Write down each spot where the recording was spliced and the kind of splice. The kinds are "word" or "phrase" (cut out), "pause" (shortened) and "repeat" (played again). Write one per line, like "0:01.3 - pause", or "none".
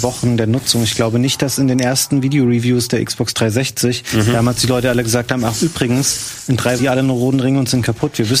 0:06.8 - phrase

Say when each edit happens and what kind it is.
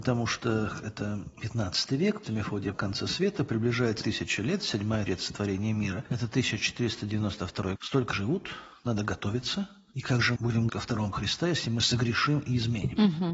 0:02.2 - word
0:02.7 - word
0:04.0 - word
0:05.1 - word
0:07.7 - word
0:08.1 - word
0:10.4 - word
0:10.7 - word
0:11.1 - word

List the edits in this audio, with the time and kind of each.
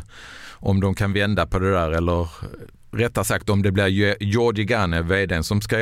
none

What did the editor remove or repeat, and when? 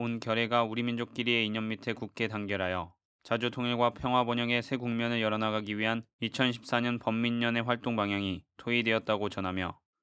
none

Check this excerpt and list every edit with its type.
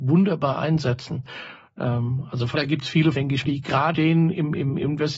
0:02.5 - word
0:03.1 - word
0:03.4 - word
0:03.9 - word

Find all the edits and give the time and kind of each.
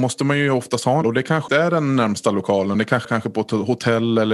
0:01.0 - word
0:01.5 - word
0:02.7 - word
0:03.0 - phrase

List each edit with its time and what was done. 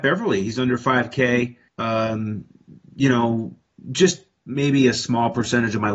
0:01.7 - pause

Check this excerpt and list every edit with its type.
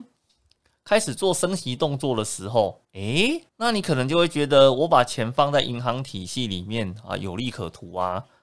0:02.8 - pause
0:03.5 - pause

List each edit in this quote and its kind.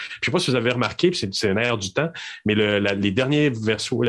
none

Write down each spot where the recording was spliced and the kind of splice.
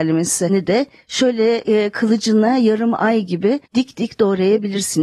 0:03.7 - pause

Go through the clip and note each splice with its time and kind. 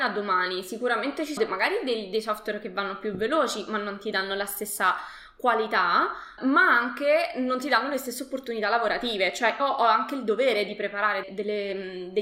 0:01.4 - word
0:06.4 - word
0:09.6 - word
0:11.2 - word

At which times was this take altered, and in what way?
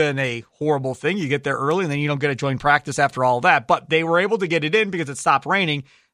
none

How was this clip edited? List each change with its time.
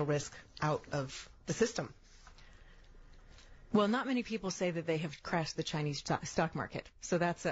none

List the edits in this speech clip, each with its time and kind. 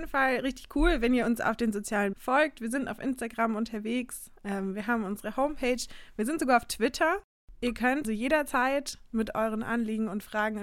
0:02.1 - word
0:04.4 - pause
0:08.0 - word

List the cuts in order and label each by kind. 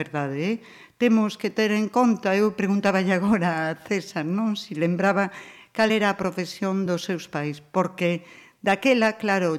none

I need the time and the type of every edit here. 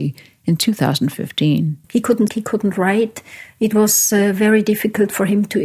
0:01.8 - pause
0:02.3 - word

